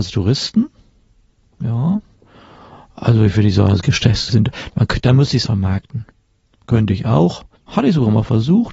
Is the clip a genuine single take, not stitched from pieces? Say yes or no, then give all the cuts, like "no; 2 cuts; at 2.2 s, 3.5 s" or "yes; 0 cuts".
no; 3 cuts; at 4.3 s, 5.4 s, 7.6 s